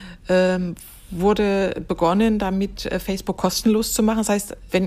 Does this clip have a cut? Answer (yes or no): no